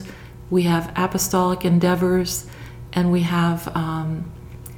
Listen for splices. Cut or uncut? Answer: uncut